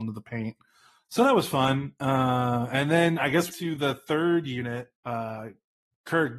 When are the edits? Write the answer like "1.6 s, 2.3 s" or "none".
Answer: 3.5 s, 5.0 s